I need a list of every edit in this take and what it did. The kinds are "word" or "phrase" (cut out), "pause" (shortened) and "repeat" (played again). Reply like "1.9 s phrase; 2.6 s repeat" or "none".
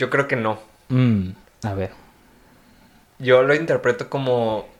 none